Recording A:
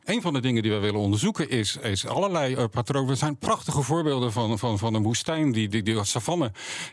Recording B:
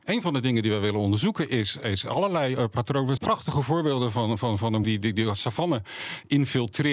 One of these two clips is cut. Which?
B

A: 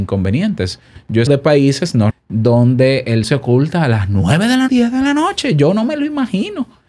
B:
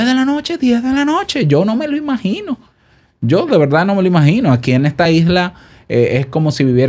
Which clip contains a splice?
A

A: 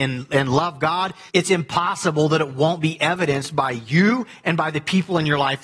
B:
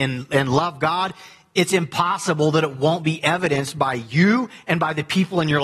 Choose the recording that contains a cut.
A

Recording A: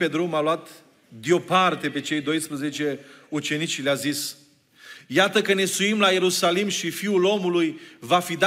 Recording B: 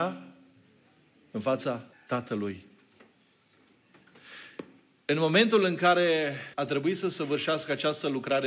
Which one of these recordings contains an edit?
B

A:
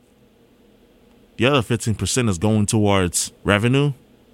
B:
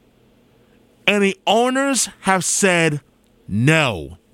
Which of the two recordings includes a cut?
A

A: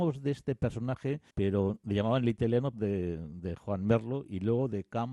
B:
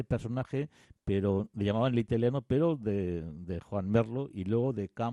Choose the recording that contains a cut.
A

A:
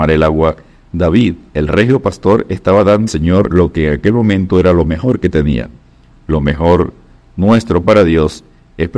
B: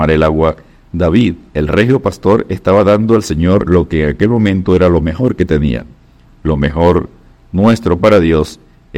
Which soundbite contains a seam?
A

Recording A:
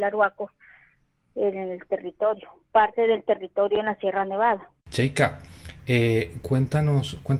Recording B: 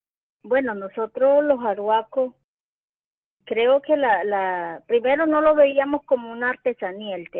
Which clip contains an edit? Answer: A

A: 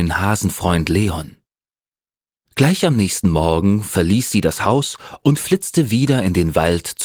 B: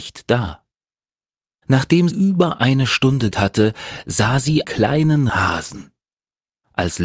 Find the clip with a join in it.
B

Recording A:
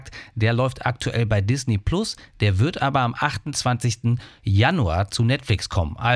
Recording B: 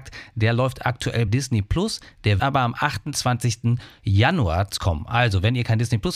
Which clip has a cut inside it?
B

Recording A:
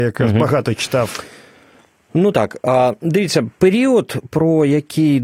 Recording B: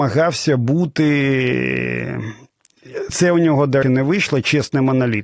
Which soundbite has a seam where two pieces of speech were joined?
B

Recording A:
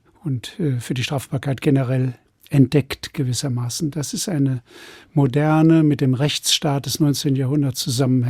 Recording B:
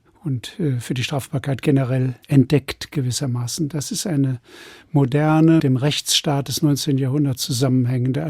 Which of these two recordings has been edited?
B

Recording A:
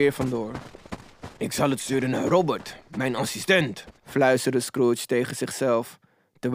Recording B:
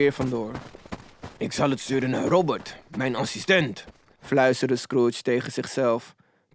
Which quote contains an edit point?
A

